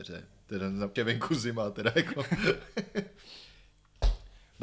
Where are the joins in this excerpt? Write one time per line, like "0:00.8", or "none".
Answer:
0:01.0